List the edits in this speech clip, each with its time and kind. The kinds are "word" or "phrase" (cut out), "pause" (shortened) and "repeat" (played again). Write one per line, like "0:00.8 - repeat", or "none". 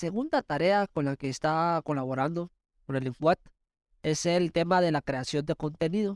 none